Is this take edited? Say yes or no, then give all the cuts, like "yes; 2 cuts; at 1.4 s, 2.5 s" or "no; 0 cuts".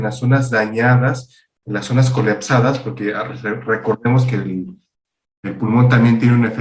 no; 0 cuts